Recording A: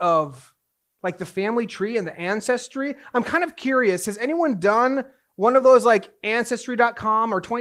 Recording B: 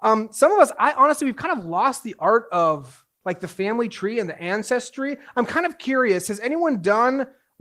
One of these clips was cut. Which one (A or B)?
B